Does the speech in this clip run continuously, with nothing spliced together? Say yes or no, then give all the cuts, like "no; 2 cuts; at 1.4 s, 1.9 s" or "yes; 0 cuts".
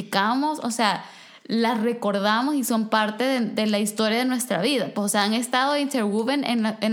yes; 0 cuts